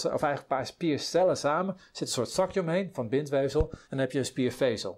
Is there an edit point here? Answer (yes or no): yes